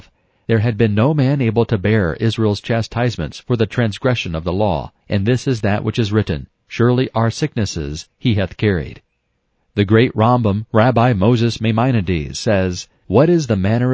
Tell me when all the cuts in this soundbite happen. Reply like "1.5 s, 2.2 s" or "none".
5.0 s, 9.4 s